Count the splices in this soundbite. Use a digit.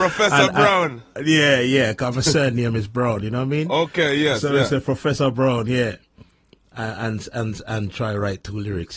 0